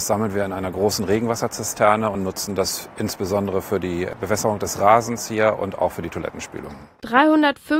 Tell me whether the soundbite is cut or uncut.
uncut